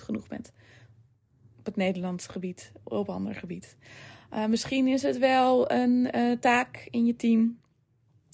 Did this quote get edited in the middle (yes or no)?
no